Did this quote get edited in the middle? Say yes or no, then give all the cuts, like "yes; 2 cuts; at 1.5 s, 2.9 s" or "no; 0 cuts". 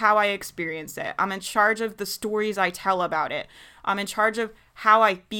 no; 0 cuts